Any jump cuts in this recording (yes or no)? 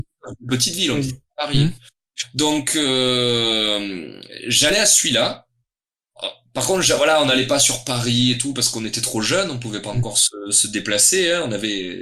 no